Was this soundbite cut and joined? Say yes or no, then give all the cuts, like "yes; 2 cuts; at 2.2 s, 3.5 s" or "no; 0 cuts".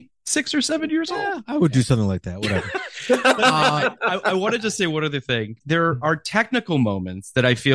yes; 1 cut; at 5.6 s